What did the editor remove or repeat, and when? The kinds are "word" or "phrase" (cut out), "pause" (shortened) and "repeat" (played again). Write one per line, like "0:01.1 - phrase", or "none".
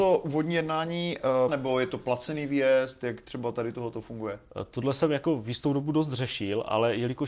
0:01.5 - phrase